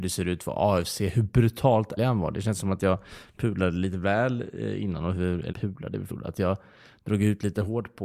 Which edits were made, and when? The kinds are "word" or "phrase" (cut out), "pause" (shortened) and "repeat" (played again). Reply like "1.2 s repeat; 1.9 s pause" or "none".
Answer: 2.0 s word; 5.5 s word; 6.1 s word